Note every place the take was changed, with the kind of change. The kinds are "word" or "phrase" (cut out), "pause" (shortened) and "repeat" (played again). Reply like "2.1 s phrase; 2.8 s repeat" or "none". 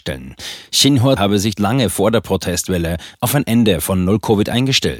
1.2 s word; 1.6 s phrase